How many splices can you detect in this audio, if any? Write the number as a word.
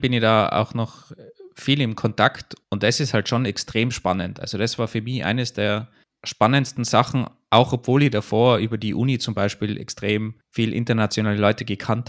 two